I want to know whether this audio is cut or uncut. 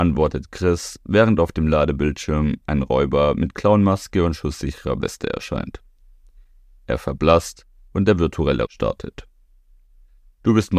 cut